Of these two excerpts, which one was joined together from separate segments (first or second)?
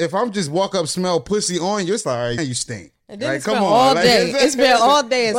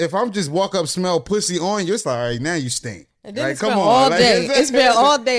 first